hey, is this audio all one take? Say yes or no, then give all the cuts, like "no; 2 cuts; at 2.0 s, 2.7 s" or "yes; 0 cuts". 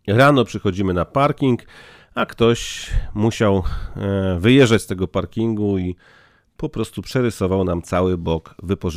yes; 0 cuts